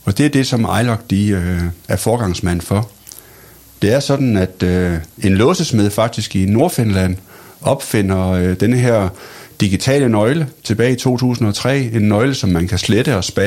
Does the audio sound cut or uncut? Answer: uncut